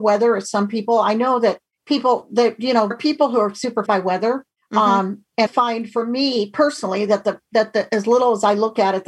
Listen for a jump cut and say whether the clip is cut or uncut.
cut